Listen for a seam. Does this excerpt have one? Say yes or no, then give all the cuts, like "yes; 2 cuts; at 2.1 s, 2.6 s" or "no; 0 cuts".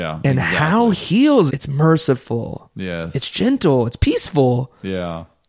yes; 2 cuts; at 0.9 s, 1.5 s